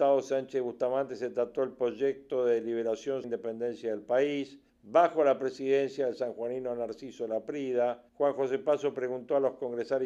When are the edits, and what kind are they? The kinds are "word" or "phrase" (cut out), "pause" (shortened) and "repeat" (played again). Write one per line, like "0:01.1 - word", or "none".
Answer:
0:03.2 - phrase
0:04.7 - pause
0:08.1 - pause